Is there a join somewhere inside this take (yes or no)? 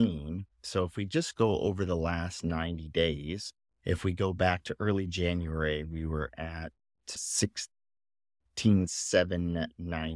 yes